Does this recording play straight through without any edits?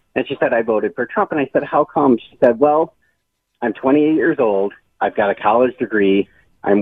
yes; 0 cuts

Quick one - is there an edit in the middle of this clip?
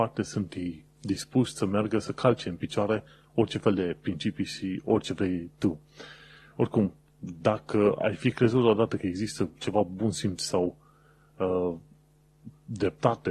no; 0 cuts

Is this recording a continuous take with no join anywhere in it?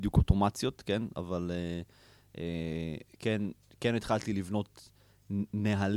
yes; 0 cuts

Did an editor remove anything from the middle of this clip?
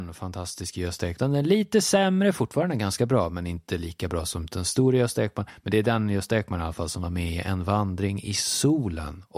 no; 0 cuts

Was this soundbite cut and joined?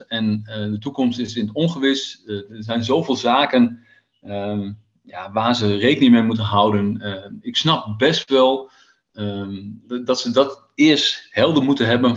no; 0 cuts

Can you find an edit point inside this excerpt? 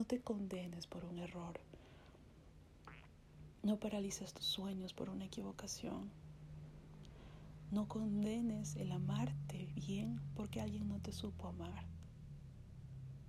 no; 0 cuts

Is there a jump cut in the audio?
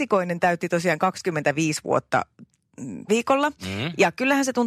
yes; 1 cut; at 3.1 s

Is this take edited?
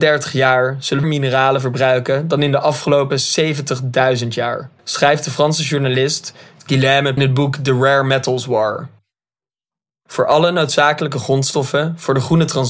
yes; 3 cuts; at 1.0 s, 4.8 s, 7.2 s

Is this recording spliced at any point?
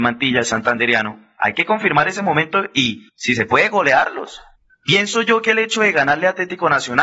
yes; 2 cuts; at 3.1 s, 4.6 s

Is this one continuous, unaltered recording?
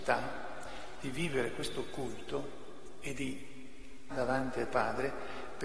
no; 2 cuts; at 4.1 s, 4.7 s

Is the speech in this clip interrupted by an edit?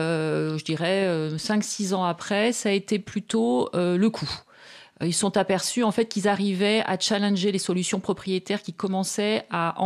no; 0 cuts

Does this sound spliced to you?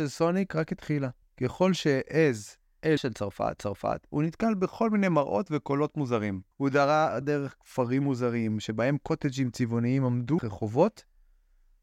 yes; 6 cuts; at 1.2 s, 3.0 s, 3.6 s, 6.5 s, 7.2 s, 10.4 s

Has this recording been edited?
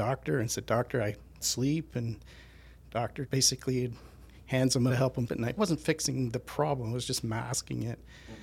yes; 5 cuts; at 1.4 s, 3.3 s, 4.9 s, 5.3 s, 5.6 s

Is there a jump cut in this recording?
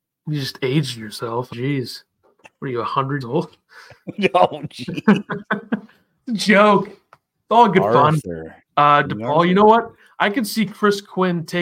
yes; 4 cuts; at 1.5 s, 3.2 s, 8.7 s, 9.0 s

